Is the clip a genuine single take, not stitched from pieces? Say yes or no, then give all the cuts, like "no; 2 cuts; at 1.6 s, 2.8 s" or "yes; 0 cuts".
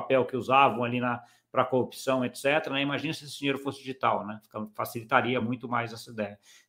yes; 0 cuts